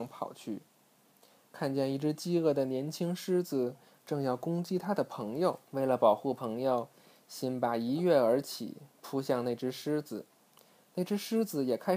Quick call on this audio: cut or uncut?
cut